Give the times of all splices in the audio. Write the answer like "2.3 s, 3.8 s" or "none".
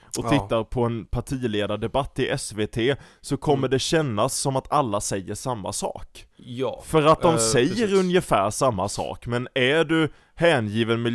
6.3 s